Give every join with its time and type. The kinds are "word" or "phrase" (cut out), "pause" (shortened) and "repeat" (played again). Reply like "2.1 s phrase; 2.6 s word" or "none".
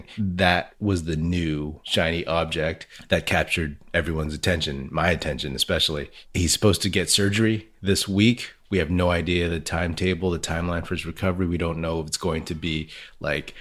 none